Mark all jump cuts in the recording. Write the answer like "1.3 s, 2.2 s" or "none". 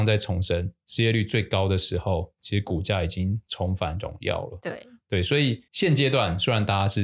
5.7 s